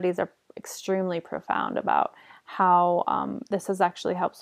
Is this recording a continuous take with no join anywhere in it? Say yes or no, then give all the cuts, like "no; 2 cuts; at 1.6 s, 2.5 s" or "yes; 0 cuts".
yes; 0 cuts